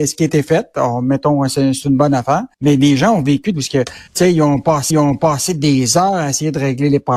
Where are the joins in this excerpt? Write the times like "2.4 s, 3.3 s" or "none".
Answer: 1.8 s, 2.5 s, 3.5 s, 4.1 s, 4.9 s